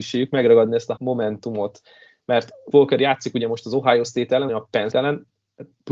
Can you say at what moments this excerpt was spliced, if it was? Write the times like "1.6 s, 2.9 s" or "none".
1.0 s, 2.7 s, 4.5 s, 4.9 s